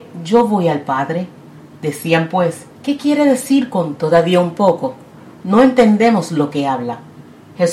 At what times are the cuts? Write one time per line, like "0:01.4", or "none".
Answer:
0:02.7

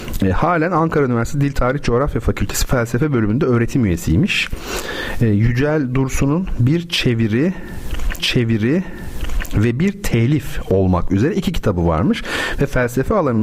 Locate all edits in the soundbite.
0:08.2

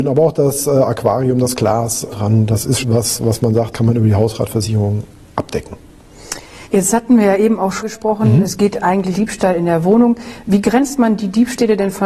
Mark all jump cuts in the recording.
0:02.1
0:02.8
0:03.7
0:06.7
0:07.8
0:09.1

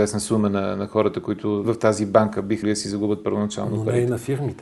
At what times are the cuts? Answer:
0:01.6
0:02.6

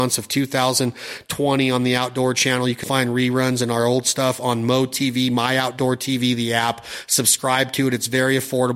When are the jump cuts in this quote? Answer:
0:02.8

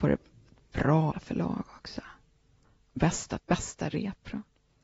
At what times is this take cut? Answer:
0:01.1
0:03.0
0:03.4

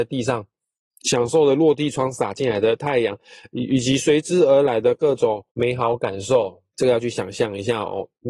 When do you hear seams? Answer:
0:05.5
0:06.7

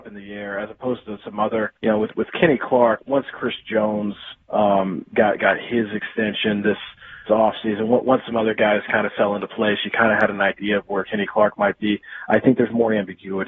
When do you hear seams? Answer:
0:01.8
0:03.0
0:04.4
0:07.3

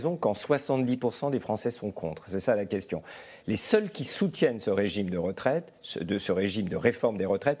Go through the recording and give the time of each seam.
none

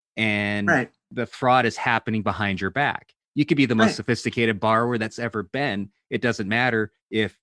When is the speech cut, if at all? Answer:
none

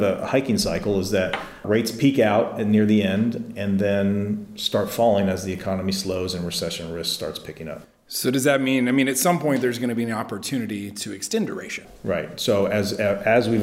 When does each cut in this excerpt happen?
0:01.6

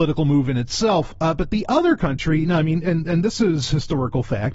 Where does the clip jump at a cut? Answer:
none

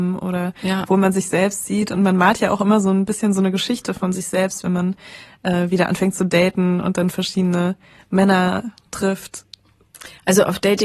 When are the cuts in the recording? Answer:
none

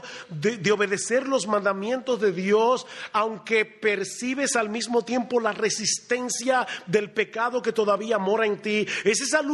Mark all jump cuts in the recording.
none

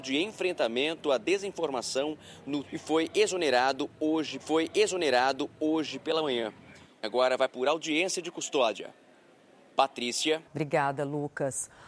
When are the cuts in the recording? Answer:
0:02.6
0:04.4
0:07.0
0:07.5
0:10.5

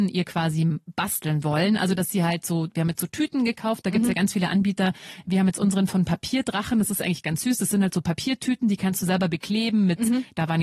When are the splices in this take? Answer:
none

